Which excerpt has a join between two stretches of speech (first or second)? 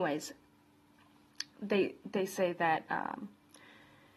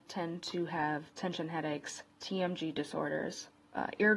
first